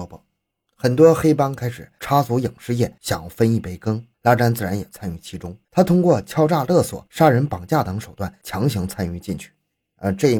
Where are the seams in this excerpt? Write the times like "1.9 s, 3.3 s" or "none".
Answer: 4.1 s, 5.6 s